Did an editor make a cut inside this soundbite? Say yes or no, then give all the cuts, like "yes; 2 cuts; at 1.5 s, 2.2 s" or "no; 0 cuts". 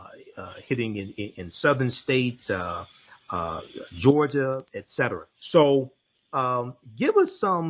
yes; 1 cut; at 5.3 s